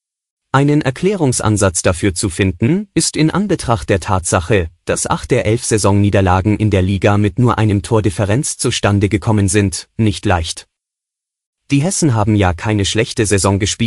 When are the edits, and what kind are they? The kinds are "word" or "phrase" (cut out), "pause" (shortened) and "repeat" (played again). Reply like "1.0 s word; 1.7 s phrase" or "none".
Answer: none